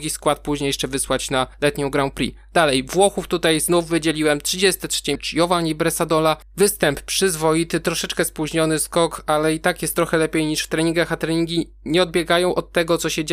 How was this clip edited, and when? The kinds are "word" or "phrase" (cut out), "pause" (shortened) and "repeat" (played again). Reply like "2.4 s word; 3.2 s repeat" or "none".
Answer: 5.1 s word